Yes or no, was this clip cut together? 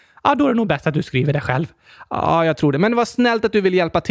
no